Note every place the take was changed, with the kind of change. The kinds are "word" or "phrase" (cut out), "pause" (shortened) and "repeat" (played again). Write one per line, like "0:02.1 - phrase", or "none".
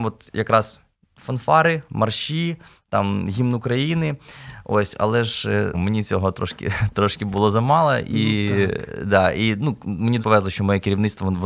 0:05.7 - word
0:10.2 - word